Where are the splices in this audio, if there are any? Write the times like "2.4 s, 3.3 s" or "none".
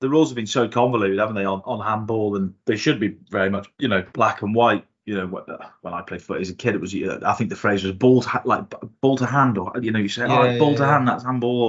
3.7 s, 4.1 s